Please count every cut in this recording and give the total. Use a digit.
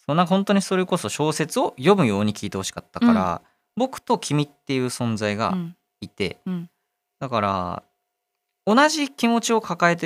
0